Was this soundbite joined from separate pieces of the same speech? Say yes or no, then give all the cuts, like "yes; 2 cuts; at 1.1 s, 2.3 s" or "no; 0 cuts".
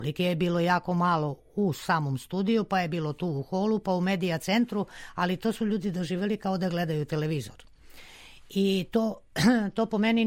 no; 0 cuts